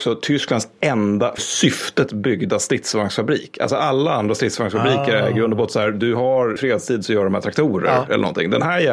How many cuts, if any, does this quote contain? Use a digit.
2